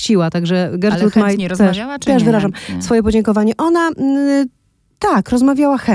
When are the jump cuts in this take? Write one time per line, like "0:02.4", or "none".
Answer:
none